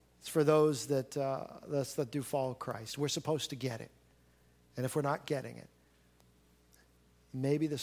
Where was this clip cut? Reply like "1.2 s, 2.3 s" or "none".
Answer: none